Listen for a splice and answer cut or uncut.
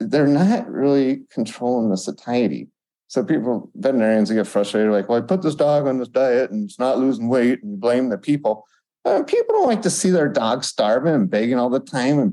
uncut